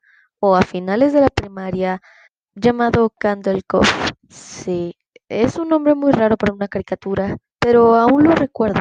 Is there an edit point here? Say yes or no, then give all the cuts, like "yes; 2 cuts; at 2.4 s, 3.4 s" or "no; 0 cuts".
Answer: yes; 3 cuts; at 2.2 s, 4.2 s, 7.4 s